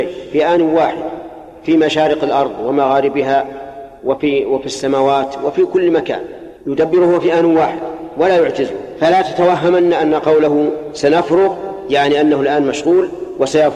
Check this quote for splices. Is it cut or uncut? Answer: cut